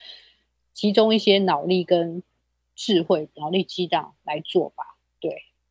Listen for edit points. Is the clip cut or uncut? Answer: uncut